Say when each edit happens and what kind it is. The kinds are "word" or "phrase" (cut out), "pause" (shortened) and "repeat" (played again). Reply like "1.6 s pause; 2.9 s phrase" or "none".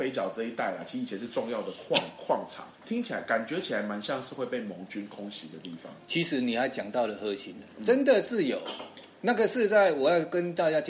2.7 s pause